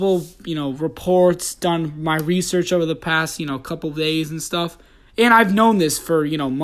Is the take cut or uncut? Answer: uncut